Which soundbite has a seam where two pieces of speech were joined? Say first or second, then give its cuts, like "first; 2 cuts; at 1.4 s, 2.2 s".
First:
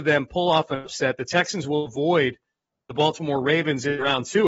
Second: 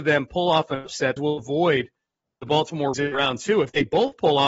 second; 2 cuts; at 1.2 s, 2.9 s